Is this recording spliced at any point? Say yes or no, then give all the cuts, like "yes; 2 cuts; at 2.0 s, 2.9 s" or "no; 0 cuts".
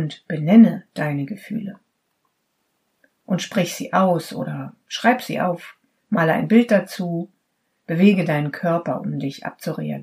no; 0 cuts